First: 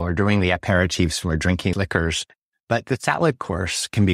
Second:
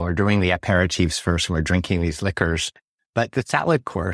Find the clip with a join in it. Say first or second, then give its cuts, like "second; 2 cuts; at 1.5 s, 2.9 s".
first; 2 cuts; at 1.2 s, 1.7 s